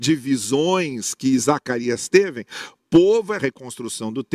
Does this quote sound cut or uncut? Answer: cut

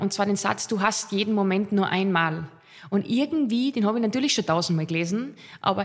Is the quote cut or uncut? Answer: uncut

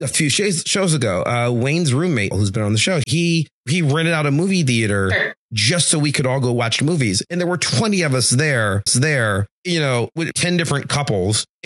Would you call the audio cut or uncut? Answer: cut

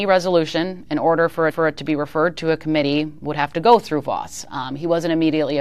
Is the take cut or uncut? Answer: cut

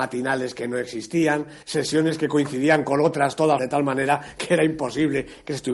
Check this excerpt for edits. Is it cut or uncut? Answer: cut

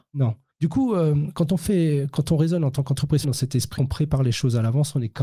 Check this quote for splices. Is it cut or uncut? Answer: cut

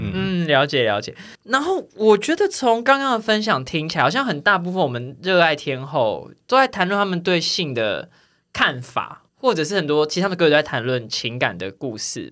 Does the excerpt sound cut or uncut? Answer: cut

